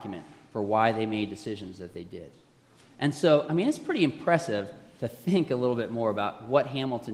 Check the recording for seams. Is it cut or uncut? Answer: uncut